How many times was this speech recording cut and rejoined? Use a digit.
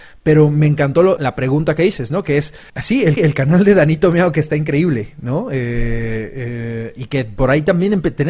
3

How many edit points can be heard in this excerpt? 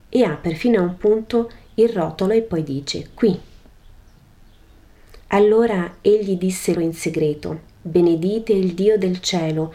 3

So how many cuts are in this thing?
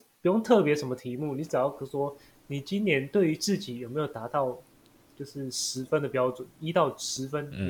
0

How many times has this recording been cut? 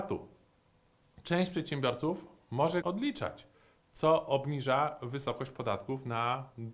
1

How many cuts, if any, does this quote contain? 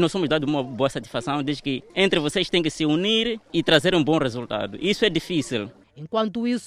1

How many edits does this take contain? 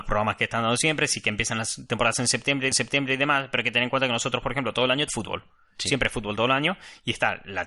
2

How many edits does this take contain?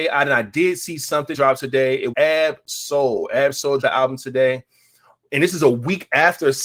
3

